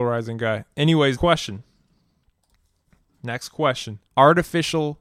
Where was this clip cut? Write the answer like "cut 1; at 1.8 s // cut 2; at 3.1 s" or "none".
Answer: cut 1; at 1.2 s // cut 2; at 4.1 s